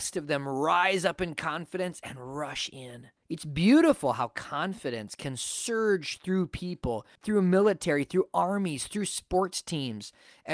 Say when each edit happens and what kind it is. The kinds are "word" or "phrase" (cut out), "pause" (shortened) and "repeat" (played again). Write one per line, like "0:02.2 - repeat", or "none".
0:03.2 - pause
0:07.1 - pause